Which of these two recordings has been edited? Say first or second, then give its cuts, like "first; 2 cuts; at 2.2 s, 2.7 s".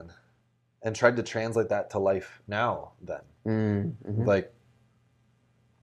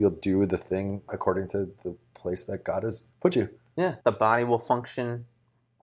second; 3 cuts; at 1.1 s, 3.1 s, 4.0 s